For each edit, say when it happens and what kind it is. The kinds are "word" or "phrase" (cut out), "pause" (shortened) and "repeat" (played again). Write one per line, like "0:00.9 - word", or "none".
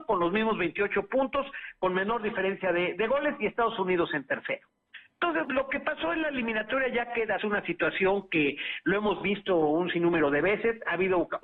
0:05.4 - word
0:07.4 - phrase